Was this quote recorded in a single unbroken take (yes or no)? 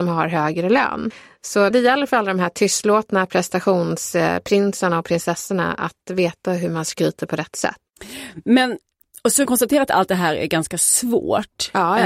no